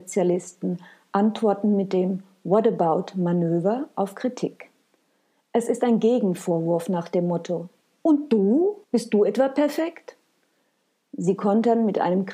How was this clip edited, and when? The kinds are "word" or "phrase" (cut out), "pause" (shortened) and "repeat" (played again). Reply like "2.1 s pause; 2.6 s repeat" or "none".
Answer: 8.8 s pause